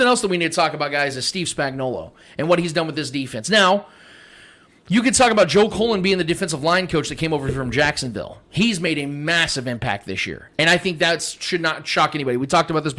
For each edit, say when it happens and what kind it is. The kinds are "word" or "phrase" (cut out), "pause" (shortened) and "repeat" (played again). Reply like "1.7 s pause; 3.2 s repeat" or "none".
none

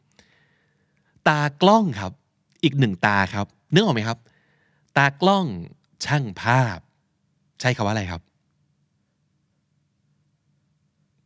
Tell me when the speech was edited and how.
none

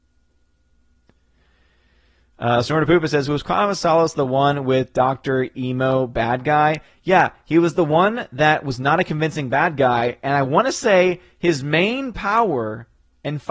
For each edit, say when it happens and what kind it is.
none

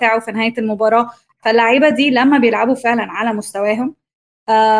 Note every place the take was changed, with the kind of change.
none

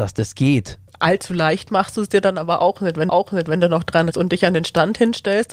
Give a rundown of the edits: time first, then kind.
3.1 s repeat; 4.1 s word

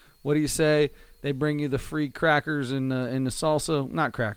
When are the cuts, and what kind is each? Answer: none

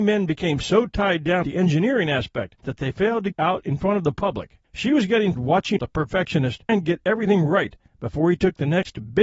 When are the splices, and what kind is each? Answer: 1.4 s word; 2.6 s pause; 3.3 s phrase; 4.6 s pause; 5.4 s word; 5.8 s phrase; 6.7 s word

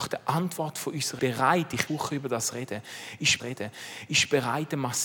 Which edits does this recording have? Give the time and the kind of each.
1.2 s phrase; 1.9 s phrase; 3.4 s repeat

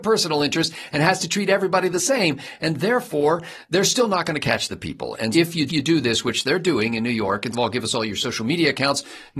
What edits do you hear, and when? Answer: 5.3 s word; 5.7 s repeat; 7.5 s phrase

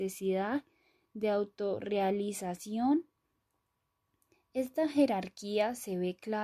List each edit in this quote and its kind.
none

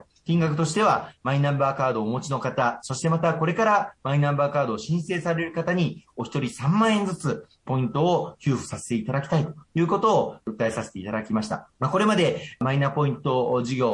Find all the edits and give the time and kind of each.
11.7 s pause

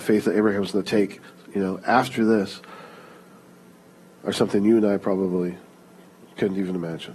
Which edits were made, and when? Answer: none

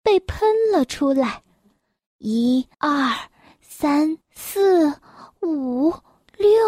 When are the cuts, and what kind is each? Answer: 2.7 s pause; 4.2 s pause

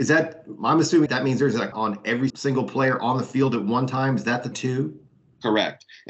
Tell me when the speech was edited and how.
1.1 s word; 1.7 s word; 2.3 s word; 4.5 s word

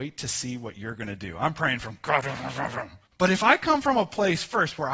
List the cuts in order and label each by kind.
3.1 s pause

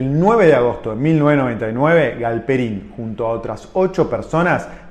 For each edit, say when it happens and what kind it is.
none

